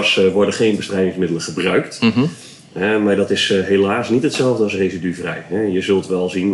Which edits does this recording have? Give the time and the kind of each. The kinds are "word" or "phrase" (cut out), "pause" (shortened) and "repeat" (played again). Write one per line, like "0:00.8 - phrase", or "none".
none